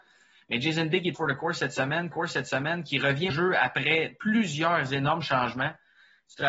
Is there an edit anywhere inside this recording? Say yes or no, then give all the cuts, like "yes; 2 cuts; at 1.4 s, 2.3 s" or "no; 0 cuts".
yes; 3 cuts; at 1.1 s, 2.1 s, 3.3 s